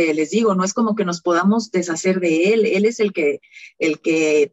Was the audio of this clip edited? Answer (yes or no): no